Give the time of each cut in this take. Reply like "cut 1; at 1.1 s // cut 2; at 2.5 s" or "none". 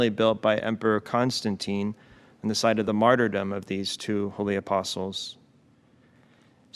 none